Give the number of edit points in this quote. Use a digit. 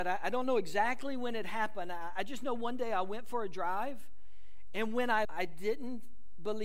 1